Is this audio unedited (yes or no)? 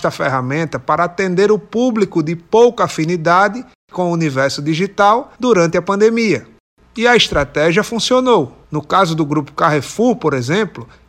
no